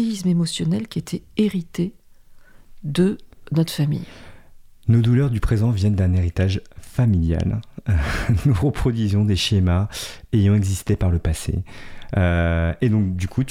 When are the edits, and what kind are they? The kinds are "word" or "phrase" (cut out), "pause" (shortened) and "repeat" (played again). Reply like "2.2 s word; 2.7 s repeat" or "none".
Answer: none